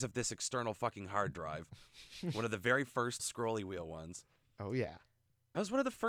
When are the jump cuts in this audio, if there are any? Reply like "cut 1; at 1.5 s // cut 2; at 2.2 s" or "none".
cut 1; at 3.2 s // cut 2; at 4.4 s